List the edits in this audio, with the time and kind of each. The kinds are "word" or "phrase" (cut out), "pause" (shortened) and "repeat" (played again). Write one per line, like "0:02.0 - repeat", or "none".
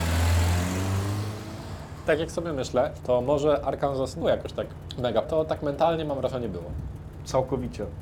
0:04.2 - word
0:05.2 - word